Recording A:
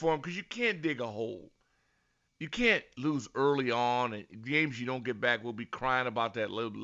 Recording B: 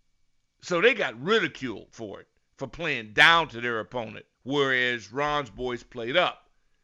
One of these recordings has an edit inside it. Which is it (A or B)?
B